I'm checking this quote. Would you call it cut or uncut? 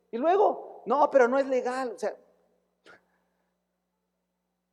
uncut